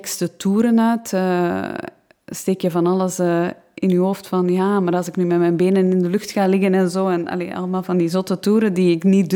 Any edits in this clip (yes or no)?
no